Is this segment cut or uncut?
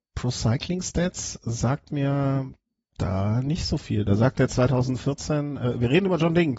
uncut